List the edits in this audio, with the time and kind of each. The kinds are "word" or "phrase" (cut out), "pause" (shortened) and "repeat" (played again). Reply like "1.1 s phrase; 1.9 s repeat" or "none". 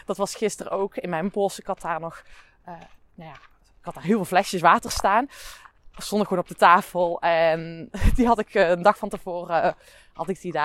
none